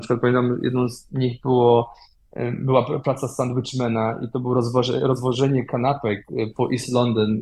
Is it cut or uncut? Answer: uncut